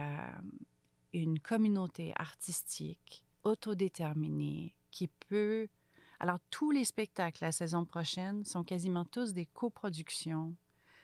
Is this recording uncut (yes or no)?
no